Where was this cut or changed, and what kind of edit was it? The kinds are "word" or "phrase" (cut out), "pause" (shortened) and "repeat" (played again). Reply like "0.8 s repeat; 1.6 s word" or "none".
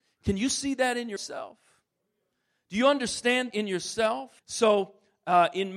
1.2 s word; 3.5 s word; 4.4 s pause